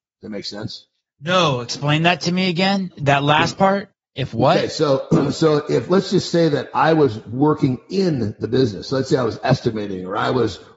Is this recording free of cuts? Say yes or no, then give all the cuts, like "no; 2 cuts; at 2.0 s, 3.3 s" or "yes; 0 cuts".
yes; 0 cuts